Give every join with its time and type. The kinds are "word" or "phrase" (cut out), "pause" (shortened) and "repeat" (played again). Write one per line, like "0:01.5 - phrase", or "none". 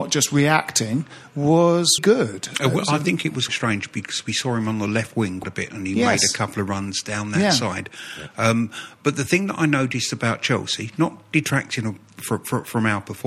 0:02.0 - word
0:03.5 - word
0:05.4 - word

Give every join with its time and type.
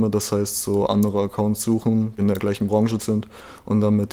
0:02.2 - word
0:03.0 - word

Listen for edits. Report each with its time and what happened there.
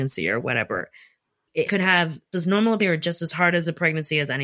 0:01.7 - word
0:02.3 - word
0:02.8 - word

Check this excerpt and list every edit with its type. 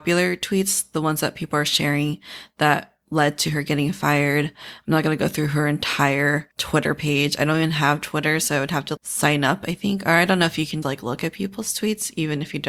0:06.5 - pause
0:09.0 - word
0:10.8 - word

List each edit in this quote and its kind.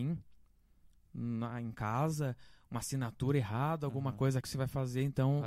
0:04.4 - word

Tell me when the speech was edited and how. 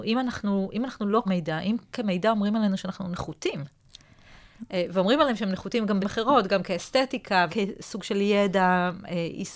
0:01.3 - word
0:01.8 - pause
0:06.0 - word
0:07.5 - word

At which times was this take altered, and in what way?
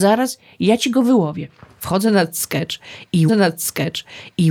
0:03.3 - repeat

